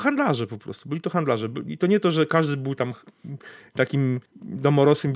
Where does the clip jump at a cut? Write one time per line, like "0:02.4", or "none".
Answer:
0:04.3